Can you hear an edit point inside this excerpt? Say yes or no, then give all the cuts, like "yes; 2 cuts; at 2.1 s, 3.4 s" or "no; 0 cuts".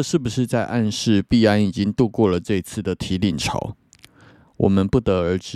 no; 0 cuts